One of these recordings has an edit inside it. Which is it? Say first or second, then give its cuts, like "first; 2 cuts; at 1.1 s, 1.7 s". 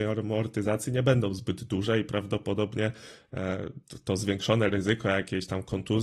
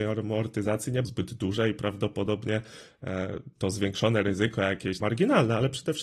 second; 3 cuts; at 1.0 s, 3.6 s, 5.0 s